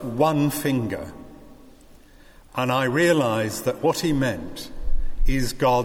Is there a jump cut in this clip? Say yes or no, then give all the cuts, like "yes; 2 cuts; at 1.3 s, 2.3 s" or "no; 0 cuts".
no; 0 cuts